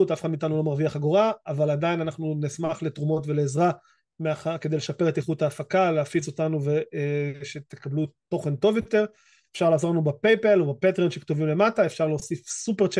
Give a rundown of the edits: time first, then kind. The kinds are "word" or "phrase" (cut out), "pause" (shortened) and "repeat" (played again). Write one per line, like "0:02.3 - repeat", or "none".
none